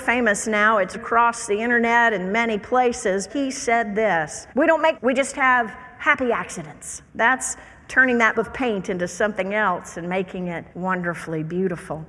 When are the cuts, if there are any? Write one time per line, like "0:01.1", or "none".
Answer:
0:00.9
0:03.3
0:04.5
0:04.9
0:07.1
0:08.3
0:10.7